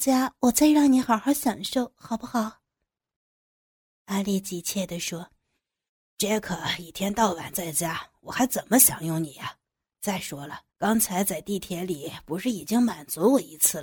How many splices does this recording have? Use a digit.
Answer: 1